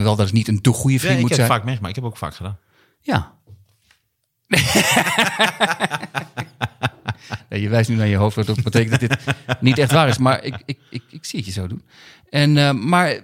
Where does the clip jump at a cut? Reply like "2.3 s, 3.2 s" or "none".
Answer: none